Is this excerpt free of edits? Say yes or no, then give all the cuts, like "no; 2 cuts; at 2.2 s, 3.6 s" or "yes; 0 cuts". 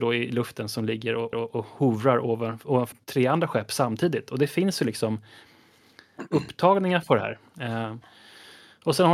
no; 2 cuts; at 1.3 s, 2.9 s